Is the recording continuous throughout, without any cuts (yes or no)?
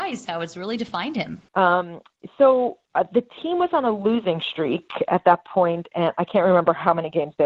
no